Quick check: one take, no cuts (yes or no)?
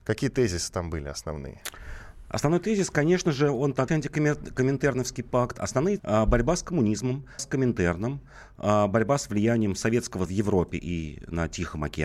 no